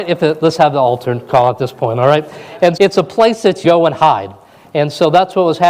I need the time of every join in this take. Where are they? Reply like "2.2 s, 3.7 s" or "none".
2.8 s, 3.6 s